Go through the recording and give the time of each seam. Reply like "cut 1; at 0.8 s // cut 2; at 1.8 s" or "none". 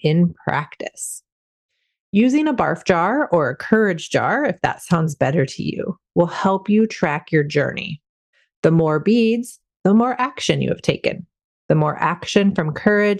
none